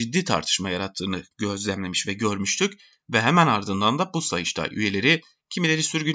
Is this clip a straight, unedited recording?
yes; 0 cuts

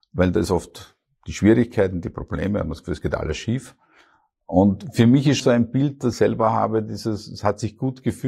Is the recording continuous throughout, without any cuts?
no; 2 cuts; at 5.4 s, 6.1 s

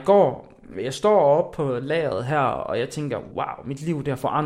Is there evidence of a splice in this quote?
yes; 1 cut; at 3.3 s

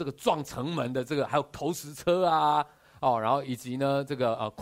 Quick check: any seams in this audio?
no; 0 cuts

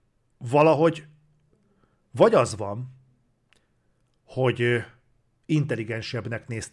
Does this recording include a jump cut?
no; 0 cuts

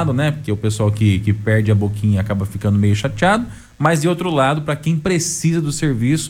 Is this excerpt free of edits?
yes; 0 cuts

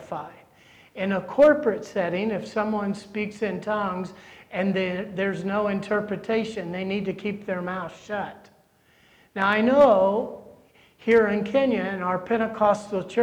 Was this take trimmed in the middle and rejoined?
no; 0 cuts

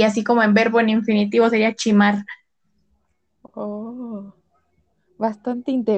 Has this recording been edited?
no; 0 cuts

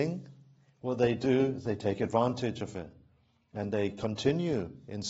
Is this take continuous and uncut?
yes; 0 cuts

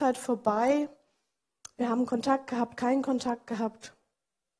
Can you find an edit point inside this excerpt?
no; 0 cuts

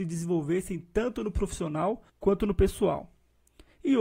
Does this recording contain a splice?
yes; 1 cut; at 2.1 s

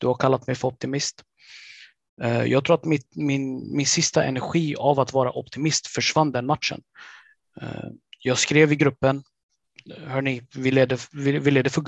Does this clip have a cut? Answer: no; 0 cuts

